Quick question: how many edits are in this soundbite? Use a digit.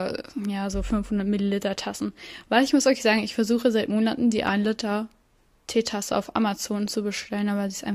0